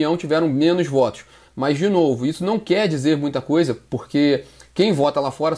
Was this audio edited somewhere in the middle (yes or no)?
no